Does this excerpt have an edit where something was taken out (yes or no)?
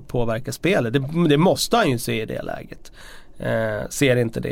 no